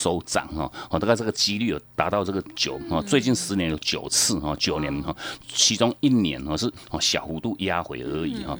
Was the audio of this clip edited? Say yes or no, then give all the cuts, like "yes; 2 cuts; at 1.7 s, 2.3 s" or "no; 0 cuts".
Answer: no; 0 cuts